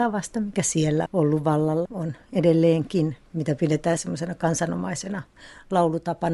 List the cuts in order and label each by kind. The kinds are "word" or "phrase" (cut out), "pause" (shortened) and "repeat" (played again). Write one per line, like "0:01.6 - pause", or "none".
0:01.1 - word
0:01.8 - word
0:03.3 - pause
0:04.0 - word